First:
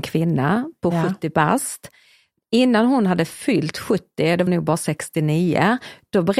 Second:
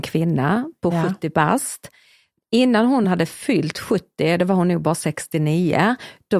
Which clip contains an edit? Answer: first; 1 cut; at 4.5 s

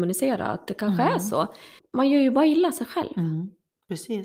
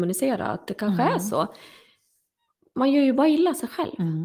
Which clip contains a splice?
first; 1 cut; at 1.8 s

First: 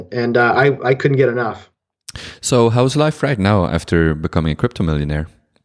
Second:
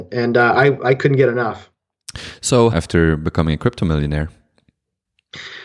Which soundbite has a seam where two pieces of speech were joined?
second; 1 cut; at 2.7 s

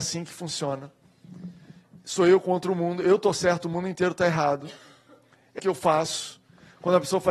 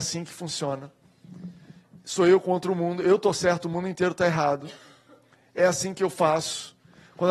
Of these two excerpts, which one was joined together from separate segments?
first; 1 cut; at 5.6 s

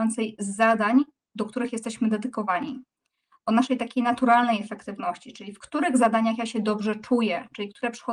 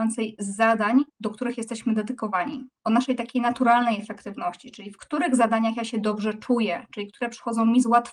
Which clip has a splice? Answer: second; 2 cuts; at 1.1 s, 2.8 s

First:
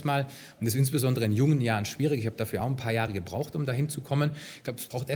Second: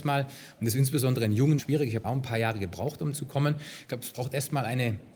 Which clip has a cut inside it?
second; 3 cuts; at 1.6 s, 2.0 s, 3.1 s

